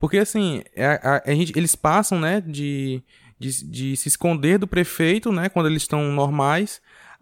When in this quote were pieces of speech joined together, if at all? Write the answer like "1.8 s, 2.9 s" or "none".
none

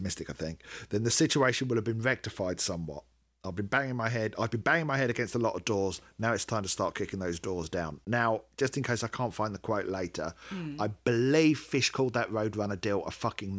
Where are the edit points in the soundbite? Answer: none

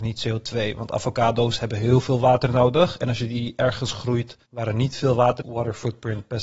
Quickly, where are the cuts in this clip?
4.5 s, 5.4 s

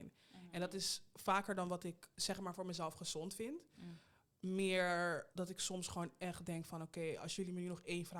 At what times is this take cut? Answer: 2.1 s, 5.3 s

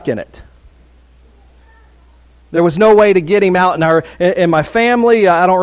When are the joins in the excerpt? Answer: none

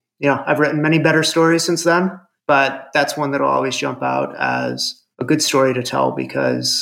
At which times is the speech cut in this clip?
2.4 s, 5.1 s

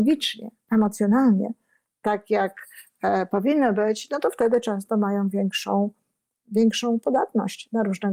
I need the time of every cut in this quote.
none

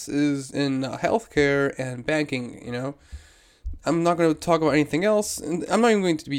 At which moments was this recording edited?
none

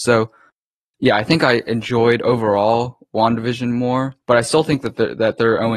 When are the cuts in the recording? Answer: 4.2 s

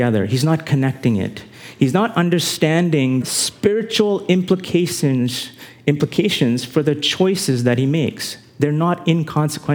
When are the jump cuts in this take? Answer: 3.2 s

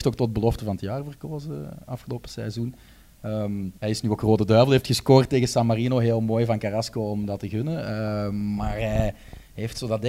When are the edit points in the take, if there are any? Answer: 3.8 s

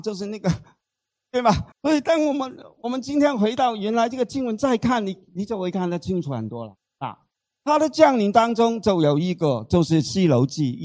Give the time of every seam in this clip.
1.7 s, 7.4 s

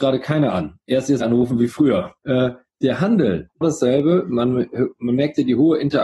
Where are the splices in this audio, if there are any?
1.2 s, 2.2 s, 3.6 s

